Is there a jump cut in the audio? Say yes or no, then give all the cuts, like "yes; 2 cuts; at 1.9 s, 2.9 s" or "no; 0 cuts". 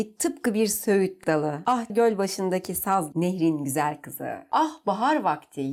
yes; 2 cuts; at 1.9 s, 3.1 s